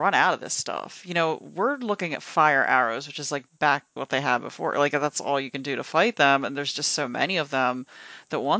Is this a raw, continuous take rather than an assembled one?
no; 1 cut; at 4.0 s

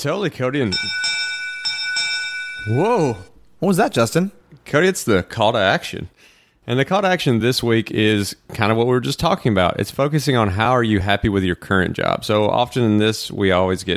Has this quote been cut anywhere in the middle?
no; 0 cuts

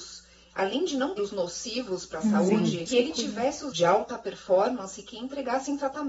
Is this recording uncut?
no; 3 cuts; at 1.2 s, 2.9 s, 3.7 s

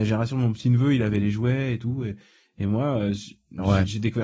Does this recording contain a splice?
no; 0 cuts

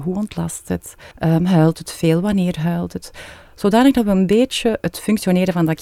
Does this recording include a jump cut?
yes; 1 cut; at 1.1 s

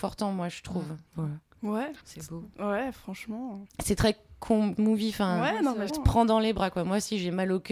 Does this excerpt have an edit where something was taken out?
yes; 5 cuts; at 1.1 s, 2.0 s, 3.7 s, 4.8 s, 5.9 s

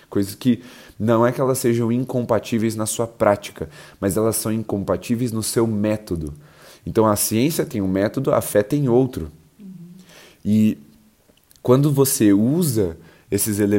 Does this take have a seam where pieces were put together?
no; 0 cuts

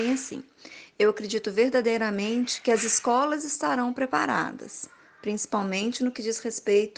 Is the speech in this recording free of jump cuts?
yes; 0 cuts

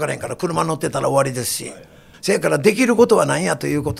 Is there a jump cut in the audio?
yes; 1 cut; at 2.1 s

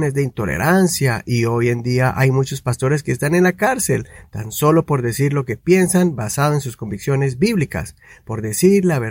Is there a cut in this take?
no; 0 cuts

